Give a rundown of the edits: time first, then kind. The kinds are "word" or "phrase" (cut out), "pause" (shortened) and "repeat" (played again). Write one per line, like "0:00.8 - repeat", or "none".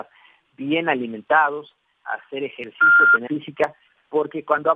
0:03.3 - word